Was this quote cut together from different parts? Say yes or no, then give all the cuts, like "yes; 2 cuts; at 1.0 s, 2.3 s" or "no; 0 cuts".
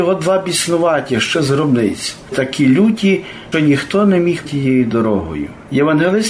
yes; 4 cuts; at 1.3 s, 2.3 s, 3.5 s, 4.4 s